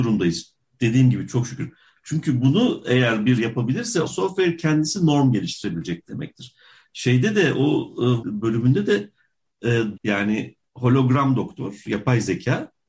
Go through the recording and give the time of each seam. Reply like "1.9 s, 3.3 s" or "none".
3.4 s, 4.1 s, 8.2 s, 10.0 s

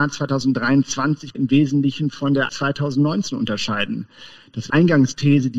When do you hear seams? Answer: 1.3 s, 2.5 s, 4.7 s

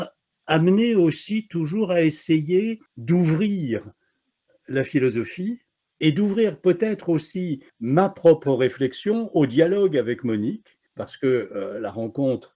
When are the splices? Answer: 2.9 s, 5.8 s, 7.7 s, 10.9 s

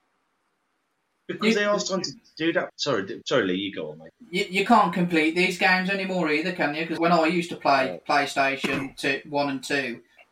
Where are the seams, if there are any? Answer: 7.0 s

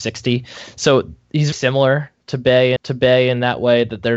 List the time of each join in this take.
1.5 s, 2.8 s

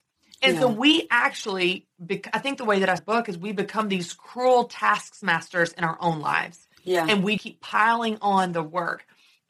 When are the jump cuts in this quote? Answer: 3.0 s, 7.4 s

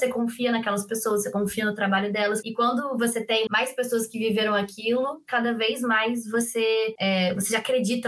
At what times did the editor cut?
3.5 s

